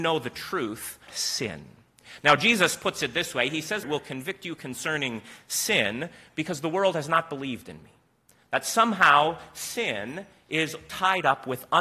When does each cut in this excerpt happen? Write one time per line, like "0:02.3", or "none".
0:01.1
0:03.8